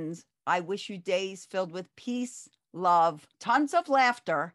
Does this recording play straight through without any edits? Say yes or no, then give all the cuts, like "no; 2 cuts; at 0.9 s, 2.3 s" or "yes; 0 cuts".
no; 1 cut; at 3.3 s